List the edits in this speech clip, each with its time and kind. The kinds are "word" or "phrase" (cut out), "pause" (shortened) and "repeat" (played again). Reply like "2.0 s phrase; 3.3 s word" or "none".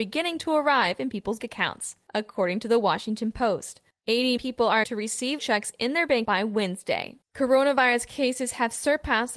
1.4 s word; 4.4 s word; 4.8 s word; 5.4 s word; 6.3 s word; 7.2 s pause